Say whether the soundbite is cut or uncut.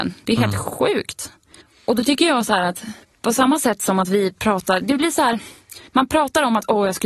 cut